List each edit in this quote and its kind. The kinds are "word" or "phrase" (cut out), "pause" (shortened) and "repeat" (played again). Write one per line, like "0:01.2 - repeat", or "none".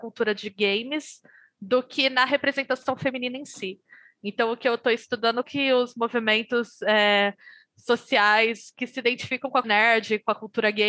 0:05.4 - word
0:09.6 - word